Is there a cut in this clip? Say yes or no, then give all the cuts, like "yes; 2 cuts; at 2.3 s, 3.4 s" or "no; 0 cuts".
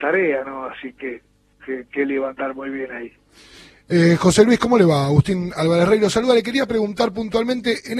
yes; 1 cut; at 1.6 s